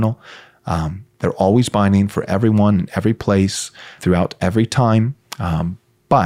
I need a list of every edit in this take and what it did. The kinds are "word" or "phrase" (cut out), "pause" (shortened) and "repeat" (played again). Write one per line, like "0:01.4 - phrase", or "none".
0:04.0 - word